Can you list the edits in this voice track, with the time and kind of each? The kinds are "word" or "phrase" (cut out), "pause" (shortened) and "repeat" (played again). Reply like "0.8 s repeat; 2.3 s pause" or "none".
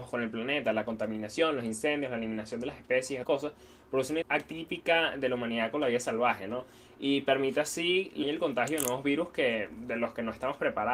3.2 s word; 4.2 s word; 8.2 s word